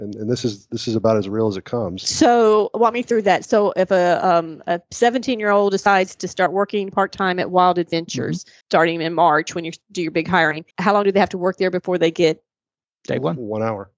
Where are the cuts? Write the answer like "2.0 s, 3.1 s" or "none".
8.6 s, 10.7 s